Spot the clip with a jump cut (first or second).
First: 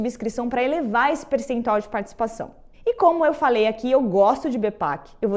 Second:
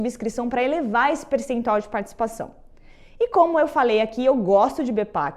first